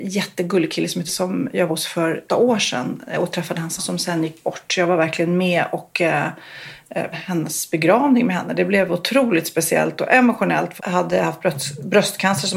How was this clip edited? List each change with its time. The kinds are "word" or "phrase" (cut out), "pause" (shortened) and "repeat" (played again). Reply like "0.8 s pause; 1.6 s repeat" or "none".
1.1 s word; 1.7 s word; 2.3 s word; 3.8 s word; 7.1 s word; 10.8 s word